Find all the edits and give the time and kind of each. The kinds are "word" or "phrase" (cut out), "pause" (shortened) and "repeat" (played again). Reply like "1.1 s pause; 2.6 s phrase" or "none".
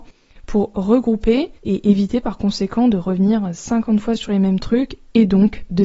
1.6 s pause